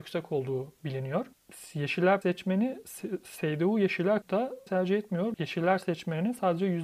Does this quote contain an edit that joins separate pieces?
yes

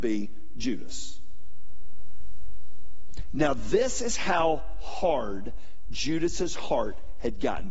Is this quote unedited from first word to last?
yes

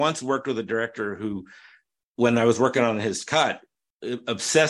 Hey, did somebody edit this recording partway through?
no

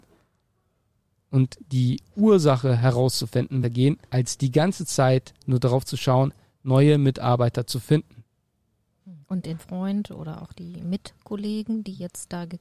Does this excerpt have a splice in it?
yes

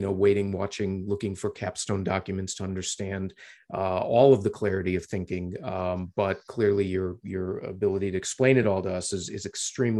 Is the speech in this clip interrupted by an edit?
no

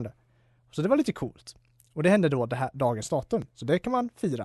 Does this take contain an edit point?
no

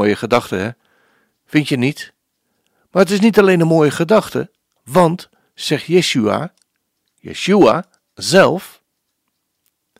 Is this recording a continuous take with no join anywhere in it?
yes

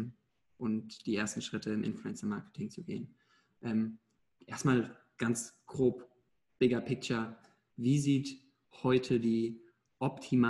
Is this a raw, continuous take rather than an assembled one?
yes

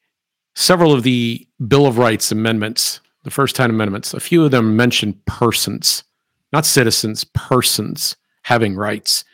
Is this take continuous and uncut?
no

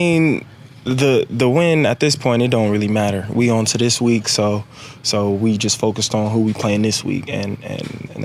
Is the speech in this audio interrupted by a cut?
no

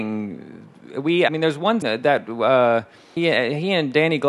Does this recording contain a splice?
yes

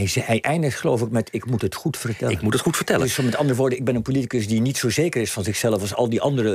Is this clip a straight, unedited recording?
yes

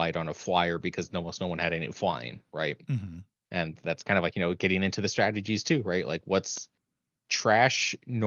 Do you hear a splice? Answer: no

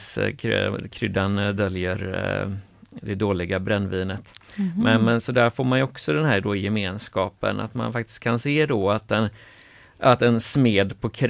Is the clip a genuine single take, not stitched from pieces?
yes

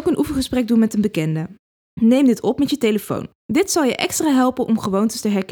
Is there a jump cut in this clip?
yes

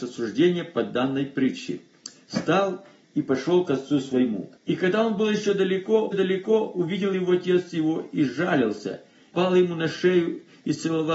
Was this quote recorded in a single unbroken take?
no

